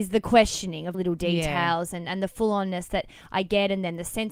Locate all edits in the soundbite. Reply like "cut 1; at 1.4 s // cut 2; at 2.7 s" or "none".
cut 1; at 0.9 s